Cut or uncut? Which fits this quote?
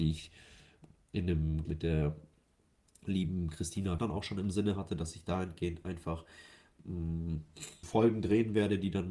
cut